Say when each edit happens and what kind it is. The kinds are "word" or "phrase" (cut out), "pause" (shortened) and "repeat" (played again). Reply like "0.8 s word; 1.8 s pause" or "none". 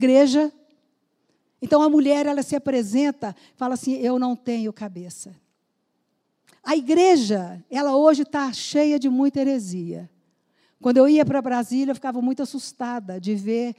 none